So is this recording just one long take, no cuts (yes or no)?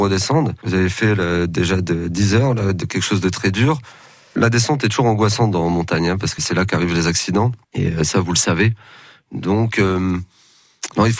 no